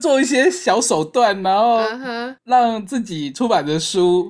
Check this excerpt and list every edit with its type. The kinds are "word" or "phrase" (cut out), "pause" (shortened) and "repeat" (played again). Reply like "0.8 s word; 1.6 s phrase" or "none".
2.4 s pause